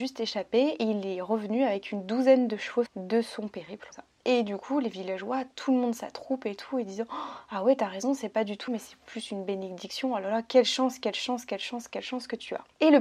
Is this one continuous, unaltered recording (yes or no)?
no